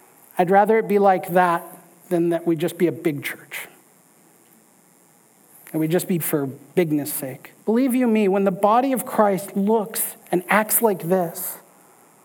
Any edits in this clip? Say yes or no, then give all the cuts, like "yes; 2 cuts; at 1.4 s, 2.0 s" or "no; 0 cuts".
yes; 3 cuts; at 6.2 s, 7.6 s, 10.2 s